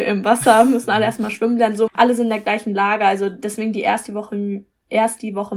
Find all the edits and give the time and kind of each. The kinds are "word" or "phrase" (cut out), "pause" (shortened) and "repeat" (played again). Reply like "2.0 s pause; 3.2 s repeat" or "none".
1.9 s word